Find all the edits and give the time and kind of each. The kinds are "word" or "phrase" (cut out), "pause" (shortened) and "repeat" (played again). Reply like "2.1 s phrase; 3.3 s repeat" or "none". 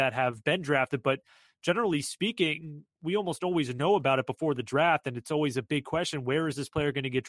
none